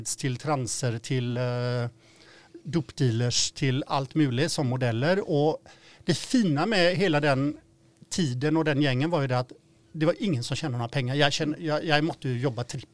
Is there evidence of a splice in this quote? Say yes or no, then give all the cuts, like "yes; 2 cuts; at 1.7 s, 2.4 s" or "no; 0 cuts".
no; 0 cuts